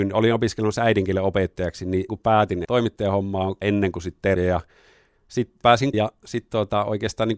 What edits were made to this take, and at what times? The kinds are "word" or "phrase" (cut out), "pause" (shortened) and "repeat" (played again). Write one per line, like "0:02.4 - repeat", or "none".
0:02.1 - word
0:02.6 - word
0:03.6 - word
0:04.4 - word
0:05.6 - word
0:05.9 - word